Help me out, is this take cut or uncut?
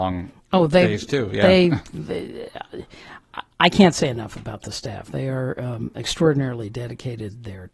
uncut